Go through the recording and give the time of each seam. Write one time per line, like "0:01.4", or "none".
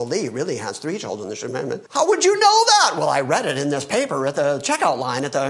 0:01.9